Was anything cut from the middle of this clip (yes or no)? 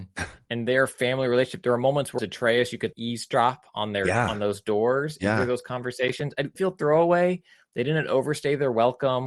yes